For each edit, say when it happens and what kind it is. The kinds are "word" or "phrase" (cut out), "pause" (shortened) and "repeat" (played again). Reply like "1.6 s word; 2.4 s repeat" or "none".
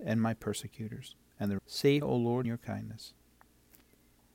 1.6 s word; 2.0 s word; 2.4 s word